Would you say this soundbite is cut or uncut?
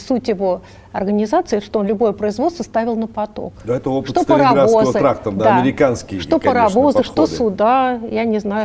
uncut